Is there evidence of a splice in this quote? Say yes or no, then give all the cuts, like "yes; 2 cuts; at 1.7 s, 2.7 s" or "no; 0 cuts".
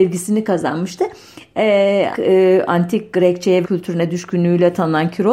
yes; 2 cuts; at 2.1 s, 3.6 s